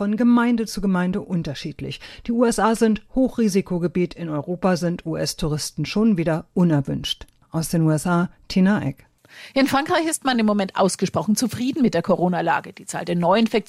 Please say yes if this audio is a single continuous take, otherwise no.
yes